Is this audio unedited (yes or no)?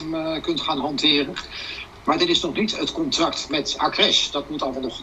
yes